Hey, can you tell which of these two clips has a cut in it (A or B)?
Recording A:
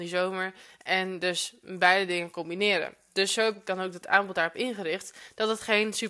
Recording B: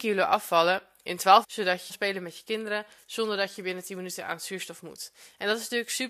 B